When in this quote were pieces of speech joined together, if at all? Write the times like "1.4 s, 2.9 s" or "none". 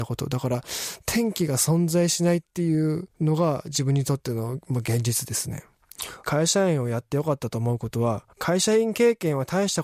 3.1 s, 8.3 s